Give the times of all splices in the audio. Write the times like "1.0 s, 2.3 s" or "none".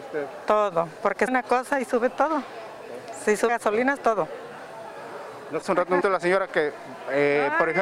1.3 s, 3.5 s, 4.0 s, 5.6 s, 6.0 s

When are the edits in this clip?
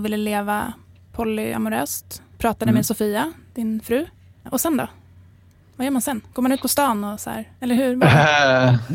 none

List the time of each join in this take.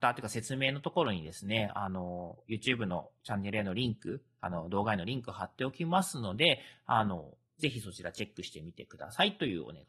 none

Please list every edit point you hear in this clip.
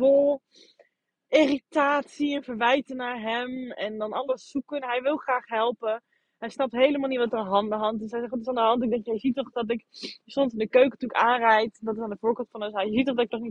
none

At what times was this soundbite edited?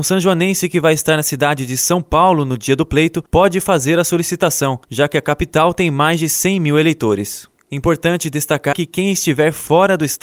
3.3 s, 4.8 s, 8.7 s

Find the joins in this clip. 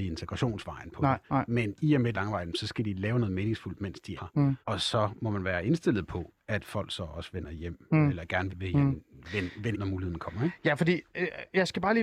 1.2 s, 2.1 s, 4.2 s, 4.6 s, 8.5 s, 9.7 s

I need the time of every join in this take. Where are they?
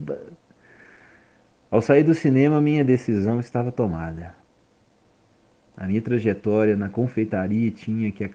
none

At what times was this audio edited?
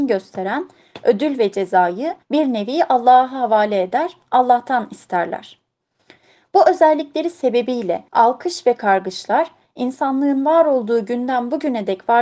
2.2 s, 8.1 s

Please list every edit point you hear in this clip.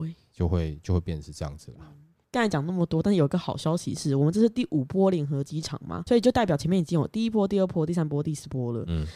6.1 s

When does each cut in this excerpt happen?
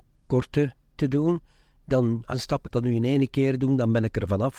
1.0 s, 2.3 s, 2.7 s

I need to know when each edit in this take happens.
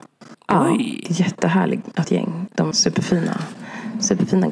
2.0 s, 2.7 s

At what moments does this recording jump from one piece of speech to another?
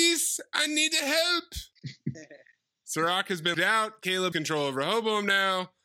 3.5 s, 4.3 s

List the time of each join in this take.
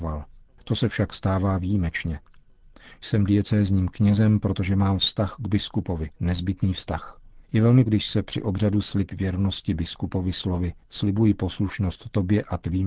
6.2 s, 7.4 s, 7.9 s, 8.8 s, 10.8 s

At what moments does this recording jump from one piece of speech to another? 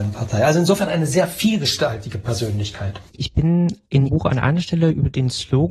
3.1 s, 4.1 s

